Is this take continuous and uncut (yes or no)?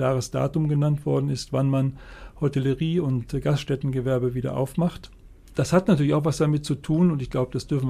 yes